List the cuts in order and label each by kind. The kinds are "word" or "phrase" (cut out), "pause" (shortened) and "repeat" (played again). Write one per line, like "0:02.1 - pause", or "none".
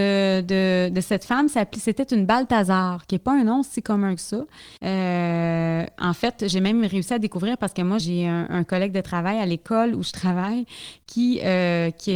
0:04.8 - pause
0:08.0 - word